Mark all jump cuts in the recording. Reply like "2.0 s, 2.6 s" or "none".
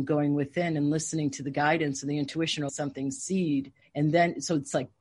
2.7 s, 3.8 s